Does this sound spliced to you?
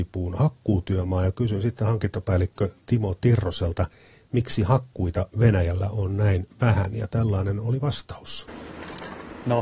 no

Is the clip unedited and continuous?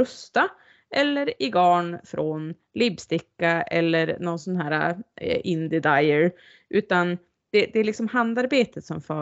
yes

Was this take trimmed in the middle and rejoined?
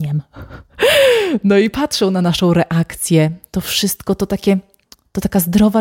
no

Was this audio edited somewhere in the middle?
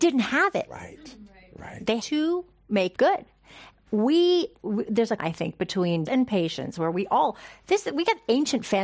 yes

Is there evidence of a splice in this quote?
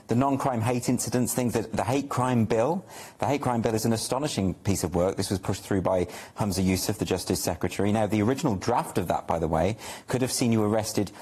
no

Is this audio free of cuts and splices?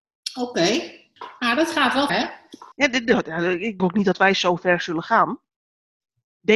no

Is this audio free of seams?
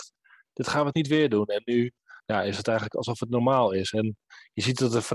no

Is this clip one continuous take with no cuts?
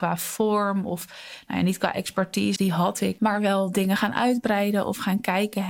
no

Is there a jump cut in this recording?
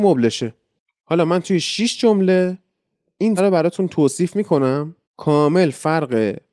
yes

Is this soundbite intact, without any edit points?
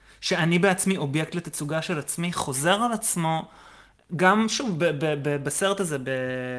yes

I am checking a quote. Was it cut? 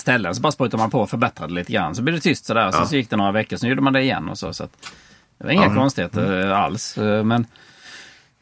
no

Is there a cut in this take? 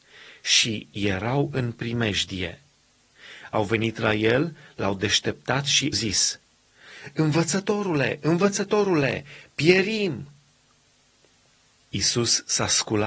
yes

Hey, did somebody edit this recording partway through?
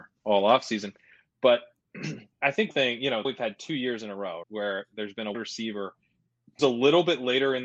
yes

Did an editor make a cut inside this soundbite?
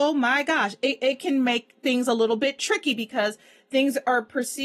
no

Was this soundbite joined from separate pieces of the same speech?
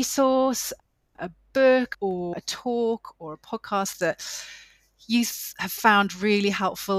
no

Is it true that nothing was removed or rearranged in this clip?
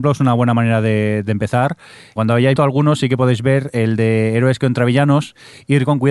no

